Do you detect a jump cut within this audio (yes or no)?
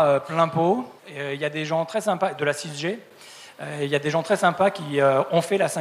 yes